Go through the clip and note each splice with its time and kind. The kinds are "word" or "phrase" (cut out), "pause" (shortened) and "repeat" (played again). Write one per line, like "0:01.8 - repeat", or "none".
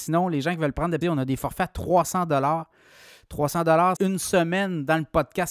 0:01.0 - word
0:04.0 - word